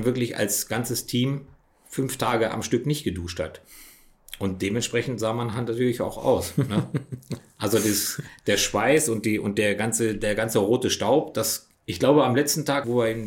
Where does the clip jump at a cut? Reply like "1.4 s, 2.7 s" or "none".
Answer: 1.6 s